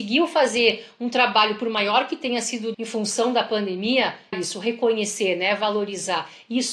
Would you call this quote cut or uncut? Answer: cut